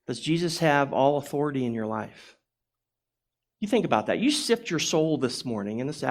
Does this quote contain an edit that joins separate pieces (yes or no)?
no